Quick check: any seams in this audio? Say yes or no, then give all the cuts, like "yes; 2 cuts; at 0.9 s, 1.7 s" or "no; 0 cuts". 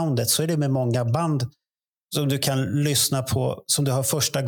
no; 0 cuts